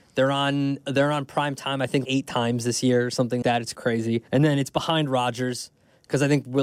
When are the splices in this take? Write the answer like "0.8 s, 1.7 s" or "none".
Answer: 2.0 s, 3.4 s, 3.7 s, 4.3 s